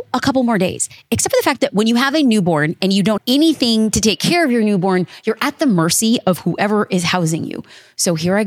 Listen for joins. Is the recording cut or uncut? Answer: cut